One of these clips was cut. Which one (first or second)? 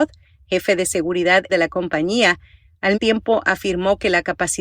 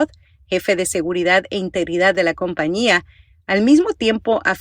first